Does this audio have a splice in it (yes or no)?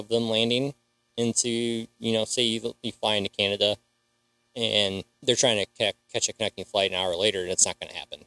yes